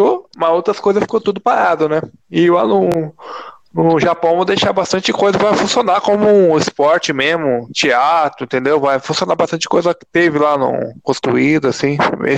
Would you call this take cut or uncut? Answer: uncut